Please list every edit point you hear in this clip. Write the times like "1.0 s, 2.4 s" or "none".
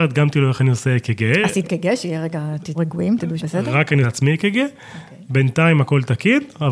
1.6 s, 2.7 s, 3.4 s, 4.0 s